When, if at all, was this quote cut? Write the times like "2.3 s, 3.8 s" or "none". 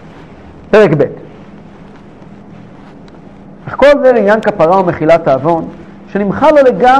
none